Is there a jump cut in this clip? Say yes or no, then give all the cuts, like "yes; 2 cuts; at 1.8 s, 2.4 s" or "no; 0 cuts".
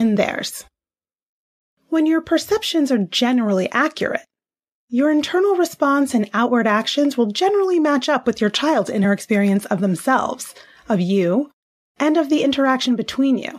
no; 0 cuts